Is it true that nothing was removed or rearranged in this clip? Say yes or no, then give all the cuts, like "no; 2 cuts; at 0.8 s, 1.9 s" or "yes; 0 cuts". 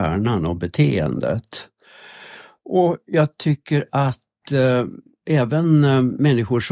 yes; 0 cuts